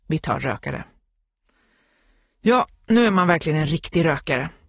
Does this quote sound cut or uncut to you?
uncut